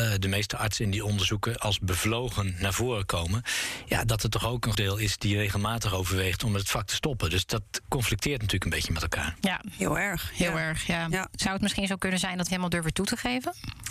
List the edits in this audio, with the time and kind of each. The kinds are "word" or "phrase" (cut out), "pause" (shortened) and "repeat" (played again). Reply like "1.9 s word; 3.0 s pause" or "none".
4.7 s word; 12.5 s phrase